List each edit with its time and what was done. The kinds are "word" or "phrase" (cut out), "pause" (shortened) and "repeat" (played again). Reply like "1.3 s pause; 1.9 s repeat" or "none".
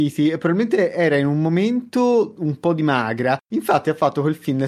3.4 s pause